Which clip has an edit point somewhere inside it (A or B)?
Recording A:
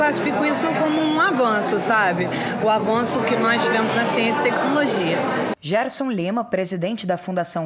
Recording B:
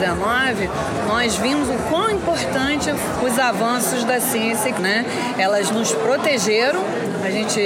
B